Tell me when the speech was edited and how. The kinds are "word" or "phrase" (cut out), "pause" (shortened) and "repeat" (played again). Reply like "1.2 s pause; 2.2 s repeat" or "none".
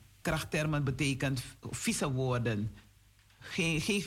none